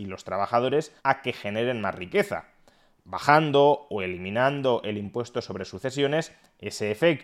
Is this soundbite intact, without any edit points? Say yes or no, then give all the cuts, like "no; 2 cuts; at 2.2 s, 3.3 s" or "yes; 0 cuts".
no; 1 cut; at 1.0 s